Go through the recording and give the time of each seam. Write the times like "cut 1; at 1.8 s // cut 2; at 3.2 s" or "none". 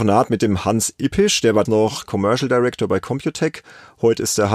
cut 1; at 1.7 s